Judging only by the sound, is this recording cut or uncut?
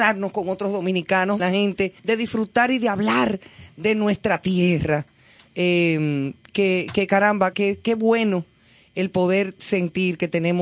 cut